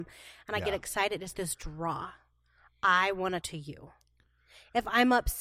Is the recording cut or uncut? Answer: cut